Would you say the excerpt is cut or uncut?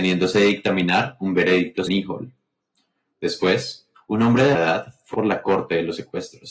cut